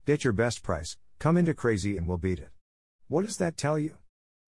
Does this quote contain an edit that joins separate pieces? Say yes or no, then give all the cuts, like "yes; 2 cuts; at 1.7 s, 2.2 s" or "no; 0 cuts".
yes; 1 cut; at 2.0 s